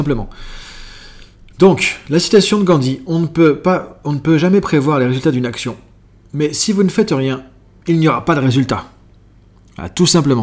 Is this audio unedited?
yes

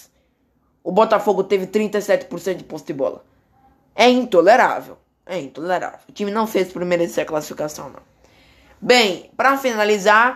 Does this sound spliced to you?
no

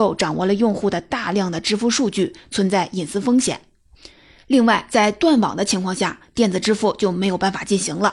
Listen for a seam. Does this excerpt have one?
no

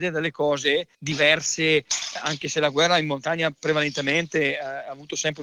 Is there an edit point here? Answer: yes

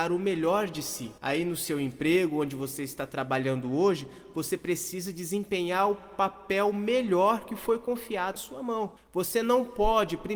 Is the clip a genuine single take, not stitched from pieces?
no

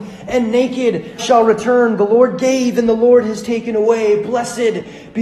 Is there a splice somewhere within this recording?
yes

